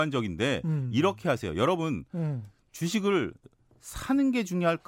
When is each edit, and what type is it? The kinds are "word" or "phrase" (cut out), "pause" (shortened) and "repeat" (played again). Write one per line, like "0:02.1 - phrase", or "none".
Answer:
none